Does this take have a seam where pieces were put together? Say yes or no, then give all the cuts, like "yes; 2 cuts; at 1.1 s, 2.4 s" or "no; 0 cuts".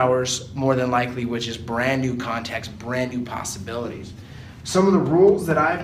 no; 0 cuts